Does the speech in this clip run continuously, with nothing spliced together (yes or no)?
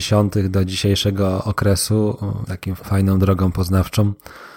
no